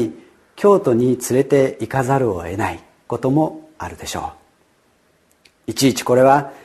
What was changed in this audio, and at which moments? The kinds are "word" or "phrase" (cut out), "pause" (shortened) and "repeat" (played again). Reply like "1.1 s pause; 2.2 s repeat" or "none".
none